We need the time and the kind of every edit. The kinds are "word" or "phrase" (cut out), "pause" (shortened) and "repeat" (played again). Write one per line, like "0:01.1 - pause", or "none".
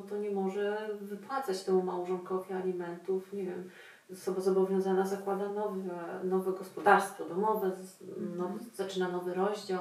none